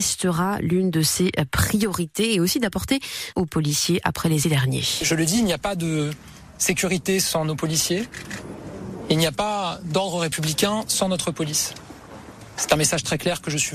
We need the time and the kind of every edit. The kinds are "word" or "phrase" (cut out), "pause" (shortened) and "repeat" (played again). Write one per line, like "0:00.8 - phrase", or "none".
0:03.3 - phrase
0:04.4 - phrase